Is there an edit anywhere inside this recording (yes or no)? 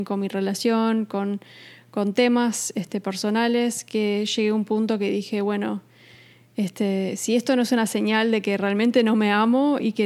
no